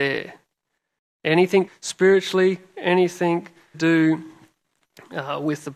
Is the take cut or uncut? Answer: cut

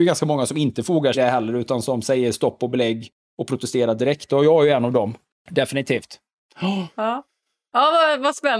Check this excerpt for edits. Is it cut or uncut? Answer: cut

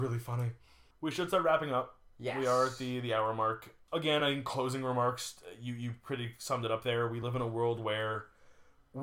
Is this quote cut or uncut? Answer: uncut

